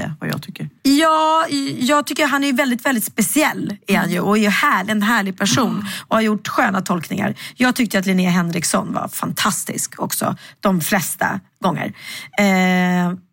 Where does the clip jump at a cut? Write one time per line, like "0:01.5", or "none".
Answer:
none